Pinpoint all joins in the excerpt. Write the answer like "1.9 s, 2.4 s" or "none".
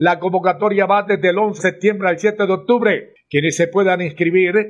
1.6 s

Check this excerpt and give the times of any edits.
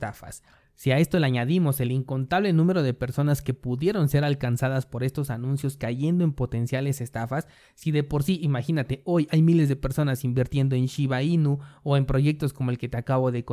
none

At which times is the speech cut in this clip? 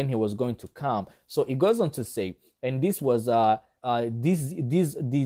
3.8 s

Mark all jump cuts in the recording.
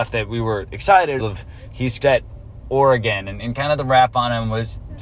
1.2 s, 2.0 s

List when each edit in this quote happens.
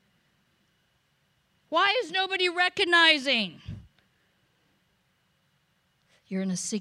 none

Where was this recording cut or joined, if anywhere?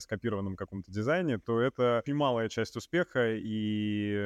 2.1 s

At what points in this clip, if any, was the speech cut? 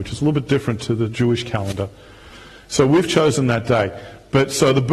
none

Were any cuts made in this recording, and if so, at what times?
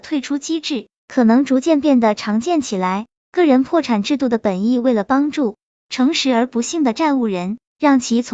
none

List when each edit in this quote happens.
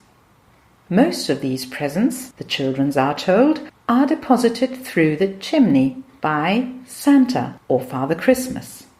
none

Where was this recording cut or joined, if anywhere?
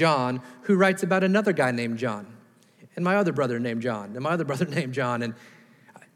none

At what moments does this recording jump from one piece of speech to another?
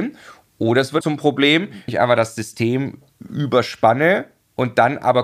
1.0 s, 1.9 s

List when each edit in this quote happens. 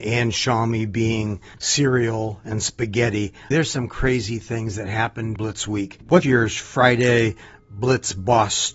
1.6 s, 3.5 s, 5.4 s, 6.2 s

